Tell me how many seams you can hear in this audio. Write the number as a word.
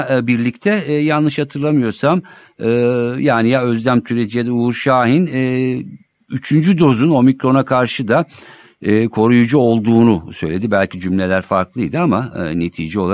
zero